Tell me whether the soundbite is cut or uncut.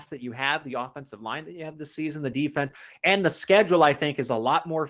uncut